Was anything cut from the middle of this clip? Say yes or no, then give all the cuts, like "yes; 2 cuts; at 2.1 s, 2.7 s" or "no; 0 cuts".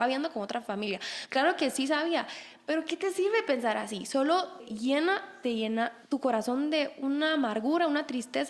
yes; 2 cuts; at 4.6 s, 6.0 s